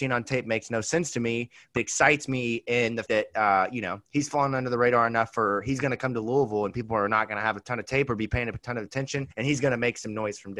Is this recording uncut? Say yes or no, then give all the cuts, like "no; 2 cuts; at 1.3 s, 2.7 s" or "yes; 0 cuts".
no; 4 cuts; at 1.8 s, 3.1 s, 4.0 s, 9.3 s